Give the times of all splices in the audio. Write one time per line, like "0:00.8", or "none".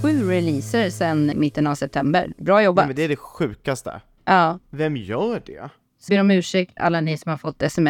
0:01.3
0:04.6
0:06.1
0:06.8